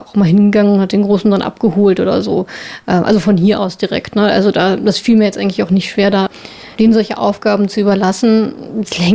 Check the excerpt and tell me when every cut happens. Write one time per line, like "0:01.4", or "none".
0:06.7